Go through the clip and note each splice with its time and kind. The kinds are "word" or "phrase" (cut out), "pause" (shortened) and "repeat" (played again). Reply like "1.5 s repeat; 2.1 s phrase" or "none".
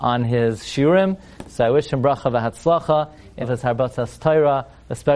3.4 s word